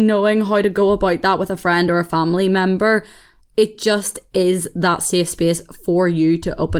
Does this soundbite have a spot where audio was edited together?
no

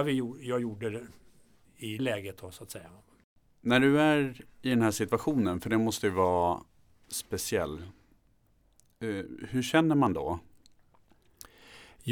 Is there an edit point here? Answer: yes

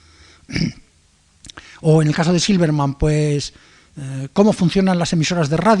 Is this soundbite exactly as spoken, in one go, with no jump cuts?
yes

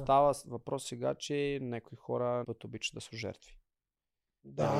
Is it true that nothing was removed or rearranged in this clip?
no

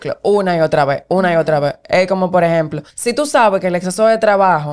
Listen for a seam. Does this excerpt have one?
yes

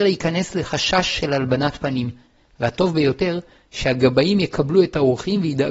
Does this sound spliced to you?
no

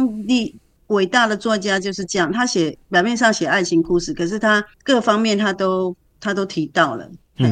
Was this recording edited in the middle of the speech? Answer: yes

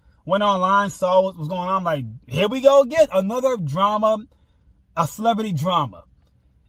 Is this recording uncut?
no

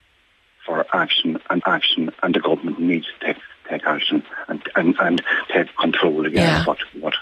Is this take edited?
yes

